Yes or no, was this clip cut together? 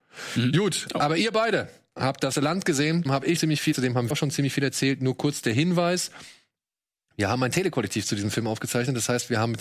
yes